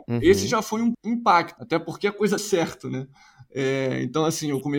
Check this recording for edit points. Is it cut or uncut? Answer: cut